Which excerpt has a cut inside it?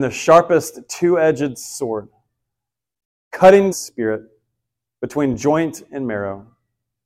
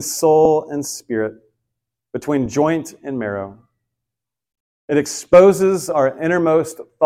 first; 1 cut; at 3.7 s

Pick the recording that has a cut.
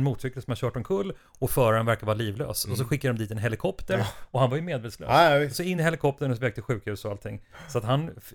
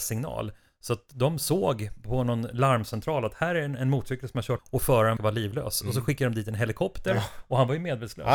second; 2 cuts; at 4.6 s, 5.2 s

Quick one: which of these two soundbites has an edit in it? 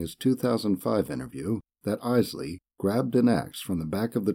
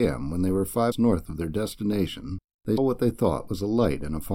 second; 2 cuts; at 0.9 s, 2.8 s

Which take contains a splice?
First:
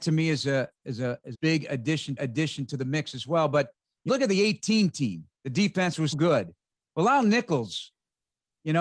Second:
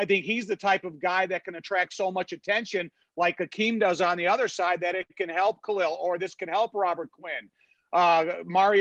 first; 5 cuts; at 1.3 s, 2.2 s, 4.1 s, 5.3 s, 6.1 s

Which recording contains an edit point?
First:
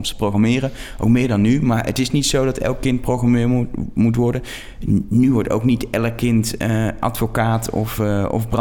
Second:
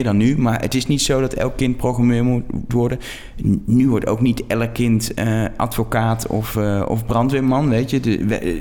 second; 1 cut; at 2.7 s

